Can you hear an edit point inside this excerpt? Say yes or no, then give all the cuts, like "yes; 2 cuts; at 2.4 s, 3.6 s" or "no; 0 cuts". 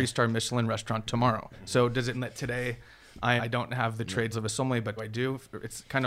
yes; 5 cuts; at 1.5 s, 2.1 s, 3.4 s, 4.3 s, 5.0 s